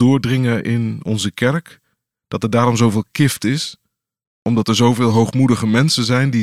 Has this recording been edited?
no; 0 cuts

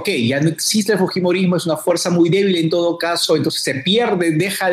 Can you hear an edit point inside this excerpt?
no; 0 cuts

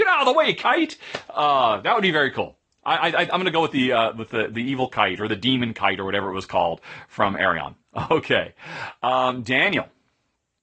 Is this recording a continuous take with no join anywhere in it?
yes; 0 cuts

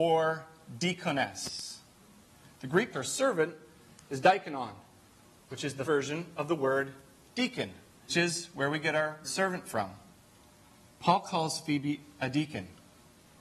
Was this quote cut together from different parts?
yes; 4 cuts; at 2.9 s, 5.9 s, 8.1 s, 9.2 s

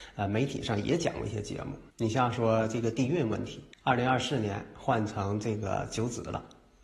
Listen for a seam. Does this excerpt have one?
yes; 2 cuts; at 1.9 s, 3.7 s

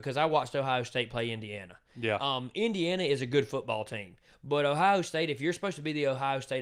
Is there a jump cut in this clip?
no; 0 cuts

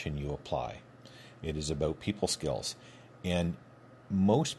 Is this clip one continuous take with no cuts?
yes; 0 cuts

